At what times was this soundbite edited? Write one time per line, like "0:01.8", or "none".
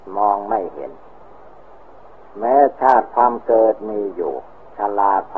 none